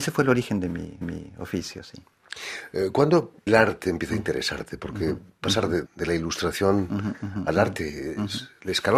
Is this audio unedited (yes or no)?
no